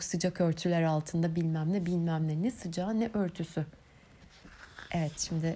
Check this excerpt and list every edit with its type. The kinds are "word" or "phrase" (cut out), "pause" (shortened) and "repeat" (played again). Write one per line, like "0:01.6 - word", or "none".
none